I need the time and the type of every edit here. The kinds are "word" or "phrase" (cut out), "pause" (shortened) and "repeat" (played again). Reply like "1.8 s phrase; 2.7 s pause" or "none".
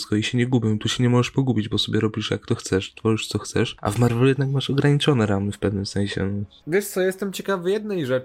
none